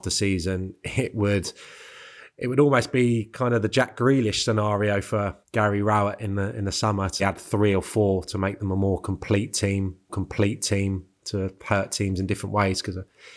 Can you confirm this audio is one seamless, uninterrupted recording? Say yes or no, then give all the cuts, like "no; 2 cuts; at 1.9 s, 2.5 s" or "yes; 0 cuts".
no; 3 cuts; at 5.4 s, 7.2 s, 10.1 s